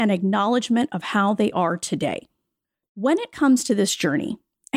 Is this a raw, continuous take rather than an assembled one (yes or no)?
yes